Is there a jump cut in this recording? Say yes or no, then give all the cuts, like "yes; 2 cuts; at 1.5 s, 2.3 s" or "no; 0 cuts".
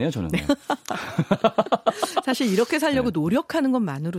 no; 0 cuts